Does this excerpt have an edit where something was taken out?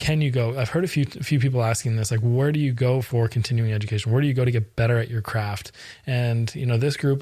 no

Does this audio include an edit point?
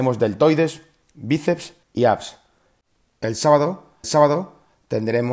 yes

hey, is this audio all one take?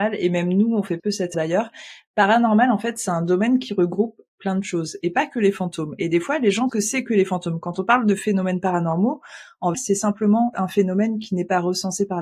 no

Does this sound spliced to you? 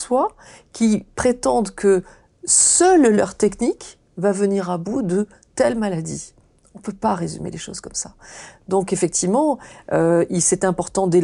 no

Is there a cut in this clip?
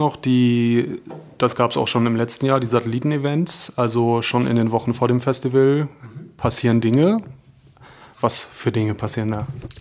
no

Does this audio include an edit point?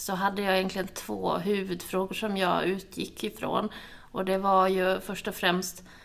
no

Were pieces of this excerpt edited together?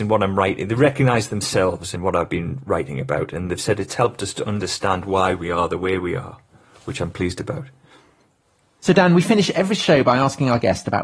no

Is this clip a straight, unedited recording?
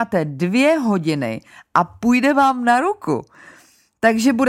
yes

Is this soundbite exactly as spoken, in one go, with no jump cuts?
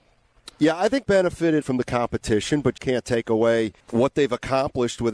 no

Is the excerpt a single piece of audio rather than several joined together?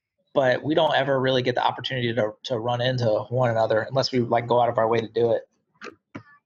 yes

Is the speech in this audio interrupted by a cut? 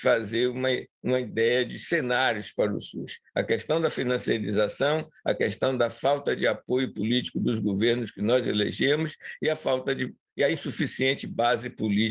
yes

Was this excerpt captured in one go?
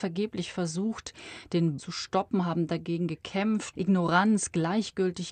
no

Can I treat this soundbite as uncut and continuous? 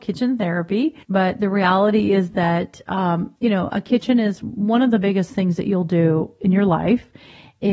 no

